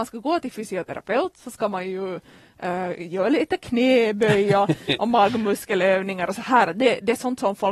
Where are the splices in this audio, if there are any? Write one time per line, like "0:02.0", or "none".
none